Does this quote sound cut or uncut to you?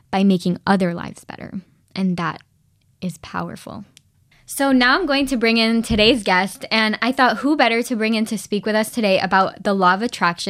uncut